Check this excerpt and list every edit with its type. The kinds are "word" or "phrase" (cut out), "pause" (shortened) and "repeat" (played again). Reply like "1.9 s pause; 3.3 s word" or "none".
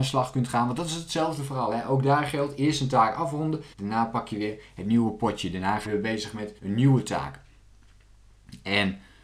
3.7 s pause; 5.8 s word; 6.6 s pause